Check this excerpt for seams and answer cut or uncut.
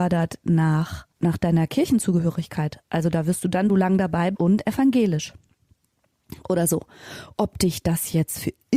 cut